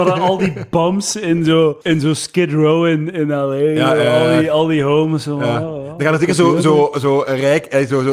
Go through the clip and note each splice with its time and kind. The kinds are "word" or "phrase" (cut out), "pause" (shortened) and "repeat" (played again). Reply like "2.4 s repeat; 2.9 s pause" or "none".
1.8 s pause